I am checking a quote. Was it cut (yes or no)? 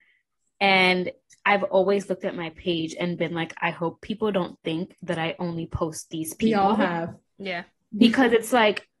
no